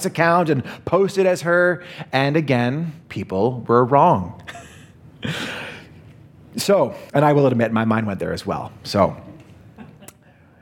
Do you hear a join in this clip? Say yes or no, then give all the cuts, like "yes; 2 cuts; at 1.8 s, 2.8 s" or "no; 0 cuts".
yes; 2 cuts; at 3.0 s, 7.1 s